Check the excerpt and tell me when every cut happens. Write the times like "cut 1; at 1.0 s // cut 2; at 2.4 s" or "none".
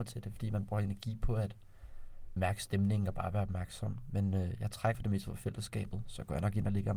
cut 1; at 2.4 s // cut 2; at 4.9 s